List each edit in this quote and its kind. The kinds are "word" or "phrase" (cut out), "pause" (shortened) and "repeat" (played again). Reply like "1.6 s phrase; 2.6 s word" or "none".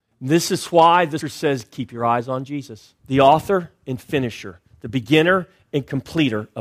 1.2 s word; 3.0 s pause